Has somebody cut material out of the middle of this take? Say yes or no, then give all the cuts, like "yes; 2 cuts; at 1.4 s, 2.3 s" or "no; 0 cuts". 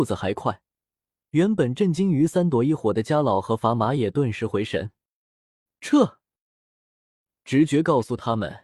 no; 0 cuts